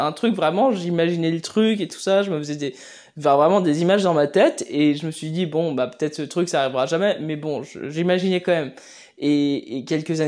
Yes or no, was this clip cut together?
no